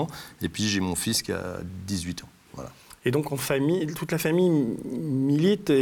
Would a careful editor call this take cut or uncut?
uncut